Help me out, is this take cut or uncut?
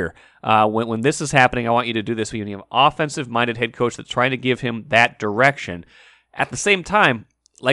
uncut